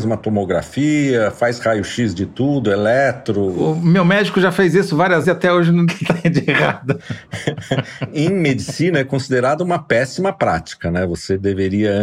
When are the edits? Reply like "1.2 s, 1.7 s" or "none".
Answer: 5.2 s, 5.9 s